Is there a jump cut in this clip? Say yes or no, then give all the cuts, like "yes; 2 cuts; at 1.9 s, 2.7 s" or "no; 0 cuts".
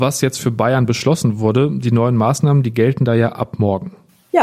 no; 0 cuts